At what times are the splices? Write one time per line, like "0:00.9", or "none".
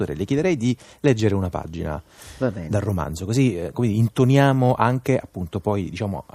none